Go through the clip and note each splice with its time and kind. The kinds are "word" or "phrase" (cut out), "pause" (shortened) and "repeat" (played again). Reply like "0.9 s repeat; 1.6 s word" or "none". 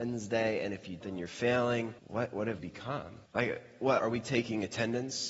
1.0 s word; 2.0 s pause; 2.6 s word; 3.3 s pause; 4.0 s word